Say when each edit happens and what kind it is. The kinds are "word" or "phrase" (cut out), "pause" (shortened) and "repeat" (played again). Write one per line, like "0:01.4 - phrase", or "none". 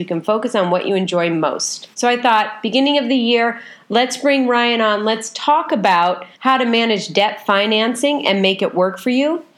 0:01.9 - pause
0:06.3 - pause